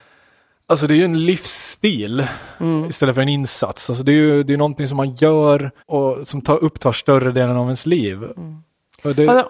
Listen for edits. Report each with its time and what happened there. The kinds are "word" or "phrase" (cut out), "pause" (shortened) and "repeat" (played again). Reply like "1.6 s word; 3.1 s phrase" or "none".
5.8 s pause